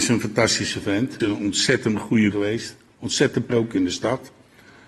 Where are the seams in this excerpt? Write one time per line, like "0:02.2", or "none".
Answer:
0:01.2
0:02.3
0:03.5